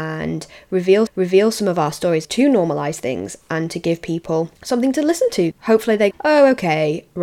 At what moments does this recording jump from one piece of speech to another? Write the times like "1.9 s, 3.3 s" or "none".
1.1 s, 2.2 s, 4.6 s, 5.5 s, 6.1 s

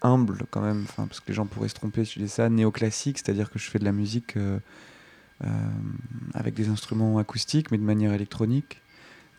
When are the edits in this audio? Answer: none

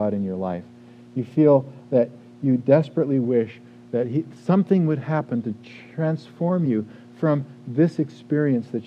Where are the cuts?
none

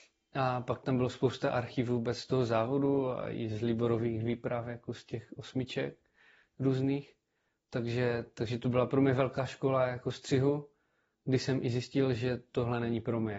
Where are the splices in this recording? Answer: none

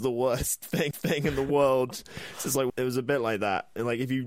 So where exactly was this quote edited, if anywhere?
0.9 s, 2.7 s

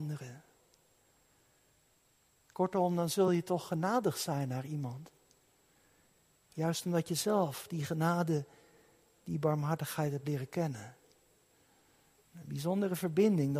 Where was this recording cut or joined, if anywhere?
none

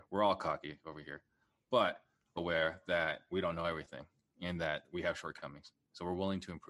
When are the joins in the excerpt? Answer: 2.4 s

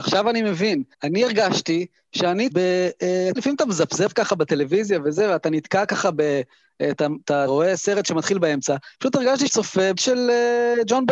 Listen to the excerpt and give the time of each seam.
0.9 s, 2.5 s, 3.4 s, 7.5 s, 8.9 s, 9.5 s, 10.0 s

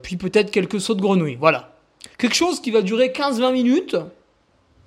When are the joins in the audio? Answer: 2.1 s

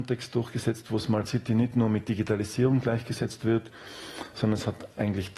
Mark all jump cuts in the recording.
none

